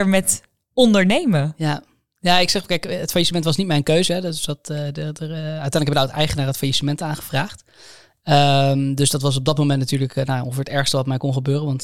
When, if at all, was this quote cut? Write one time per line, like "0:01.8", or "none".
none